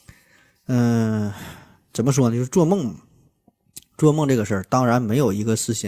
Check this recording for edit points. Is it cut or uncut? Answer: uncut